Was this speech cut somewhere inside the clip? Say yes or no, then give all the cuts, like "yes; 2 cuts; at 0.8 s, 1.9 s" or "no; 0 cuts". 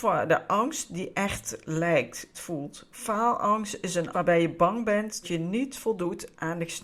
yes; 3 cuts; at 2.3 s, 4.1 s, 5.2 s